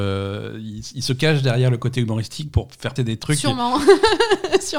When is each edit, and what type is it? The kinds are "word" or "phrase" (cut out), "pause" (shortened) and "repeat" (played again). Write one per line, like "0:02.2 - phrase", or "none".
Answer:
0:03.0 - word